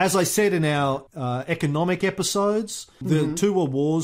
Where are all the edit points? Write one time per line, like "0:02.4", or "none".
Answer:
0:01.1
0:03.0